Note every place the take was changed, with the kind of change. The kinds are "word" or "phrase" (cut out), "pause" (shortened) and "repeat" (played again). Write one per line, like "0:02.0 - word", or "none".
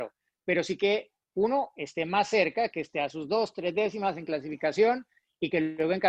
none